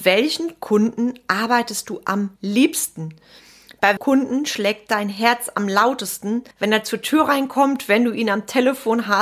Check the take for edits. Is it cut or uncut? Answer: cut